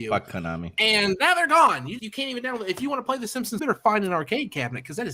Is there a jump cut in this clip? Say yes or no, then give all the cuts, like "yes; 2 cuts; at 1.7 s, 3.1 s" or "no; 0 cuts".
yes; 2 cuts; at 2.0 s, 3.6 s